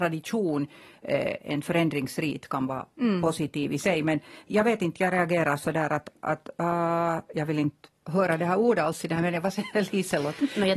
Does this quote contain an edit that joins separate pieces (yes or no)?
yes